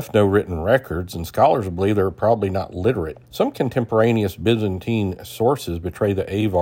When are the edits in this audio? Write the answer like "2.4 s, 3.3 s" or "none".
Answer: 3.2 s